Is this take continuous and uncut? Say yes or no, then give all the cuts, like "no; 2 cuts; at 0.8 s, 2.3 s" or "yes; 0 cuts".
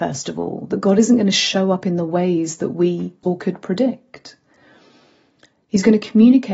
no; 1 cut; at 3.2 s